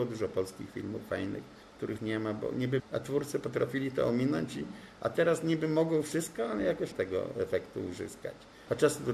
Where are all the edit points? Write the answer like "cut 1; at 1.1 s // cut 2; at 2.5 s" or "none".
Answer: cut 1; at 2.0 s // cut 2; at 2.8 s // cut 3; at 6.9 s